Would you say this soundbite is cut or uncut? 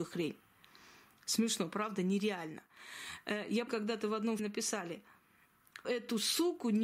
cut